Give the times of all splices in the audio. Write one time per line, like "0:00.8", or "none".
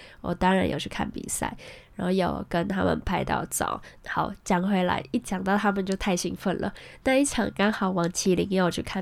0:04.0